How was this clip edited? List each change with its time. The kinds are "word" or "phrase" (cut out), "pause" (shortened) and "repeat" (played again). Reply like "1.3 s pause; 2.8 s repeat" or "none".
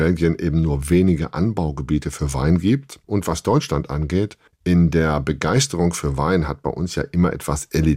3.0 s pause; 4.5 s pause